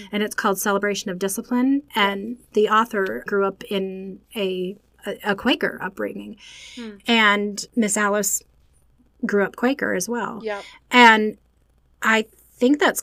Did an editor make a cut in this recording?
yes; 2 cuts; at 3.3 s, 7.7 s

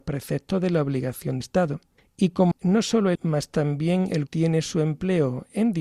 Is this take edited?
yes; 4 cuts; at 1.4 s, 2.5 s, 3.1 s, 4.3 s

